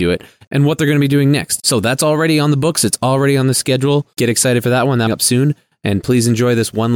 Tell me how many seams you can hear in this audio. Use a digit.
1